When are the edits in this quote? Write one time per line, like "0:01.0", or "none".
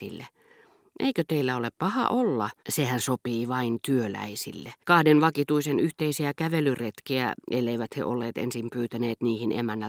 0:02.6
0:04.8